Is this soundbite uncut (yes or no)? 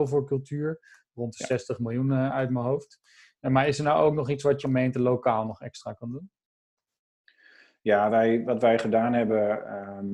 no